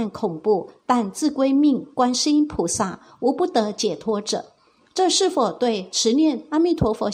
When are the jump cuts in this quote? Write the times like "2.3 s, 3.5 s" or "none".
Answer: none